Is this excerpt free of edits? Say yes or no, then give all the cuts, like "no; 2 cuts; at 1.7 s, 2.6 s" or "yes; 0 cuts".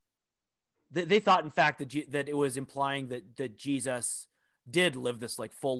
yes; 0 cuts